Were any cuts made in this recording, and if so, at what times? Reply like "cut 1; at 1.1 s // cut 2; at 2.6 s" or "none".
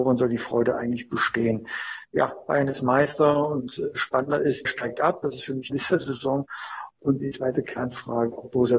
cut 1; at 4.6 s // cut 2; at 5.7 s // cut 3; at 7.2 s